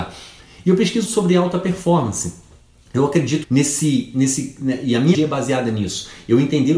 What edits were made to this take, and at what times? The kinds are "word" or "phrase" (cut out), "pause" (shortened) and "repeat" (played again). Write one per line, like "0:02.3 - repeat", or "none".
0:01.1 - word
0:03.4 - word
0:05.1 - word

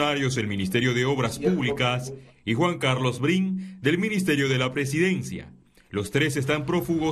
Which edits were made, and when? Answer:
none

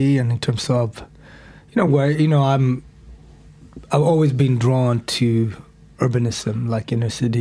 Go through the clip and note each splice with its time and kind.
none

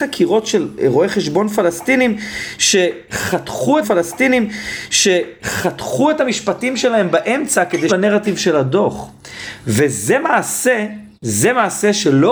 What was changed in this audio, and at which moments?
0:03.8 - repeat
0:07.9 - word
0:11.1 - pause

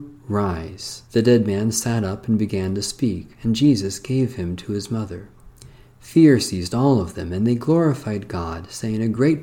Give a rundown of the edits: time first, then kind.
0:01.1 - pause

